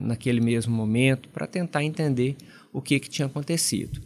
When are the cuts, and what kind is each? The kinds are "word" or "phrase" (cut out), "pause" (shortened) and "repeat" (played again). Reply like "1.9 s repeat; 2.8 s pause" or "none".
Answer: none